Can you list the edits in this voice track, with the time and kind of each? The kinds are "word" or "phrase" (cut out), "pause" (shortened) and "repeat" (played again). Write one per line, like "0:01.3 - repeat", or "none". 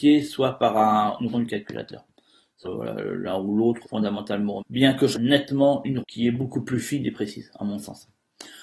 0:01.3 - word
0:02.6 - word
0:03.8 - word
0:04.6 - word
0:05.1 - word
0:06.0 - word